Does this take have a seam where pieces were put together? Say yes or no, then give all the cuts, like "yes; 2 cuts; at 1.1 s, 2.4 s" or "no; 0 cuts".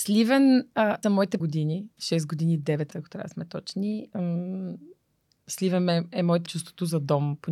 yes; 5 cuts; at 1.0 s, 1.4 s, 1.9 s, 2.9 s, 6.5 s